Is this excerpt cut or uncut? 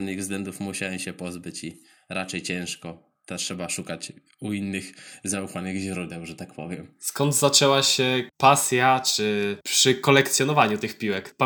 uncut